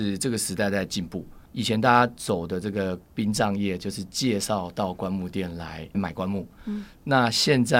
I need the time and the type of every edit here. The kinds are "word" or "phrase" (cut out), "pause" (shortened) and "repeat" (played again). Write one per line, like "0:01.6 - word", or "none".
0:01.5 - pause
0:03.0 - pause